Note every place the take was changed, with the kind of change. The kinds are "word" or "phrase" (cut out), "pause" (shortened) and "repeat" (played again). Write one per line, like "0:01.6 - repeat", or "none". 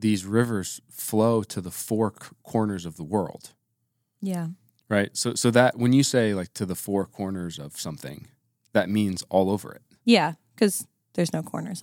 none